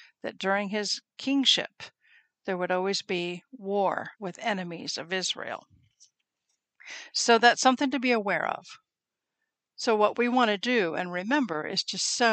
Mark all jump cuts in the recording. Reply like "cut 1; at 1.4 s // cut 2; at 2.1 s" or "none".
cut 1; at 4.1 s